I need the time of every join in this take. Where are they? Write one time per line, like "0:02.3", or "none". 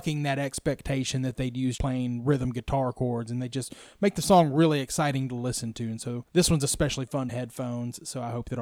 0:01.8
0:06.3
0:07.3